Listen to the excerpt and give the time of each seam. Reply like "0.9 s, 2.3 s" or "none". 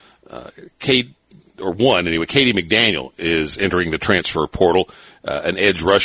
none